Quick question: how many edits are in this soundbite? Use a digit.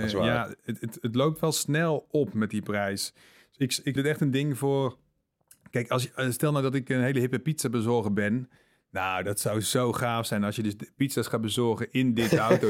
1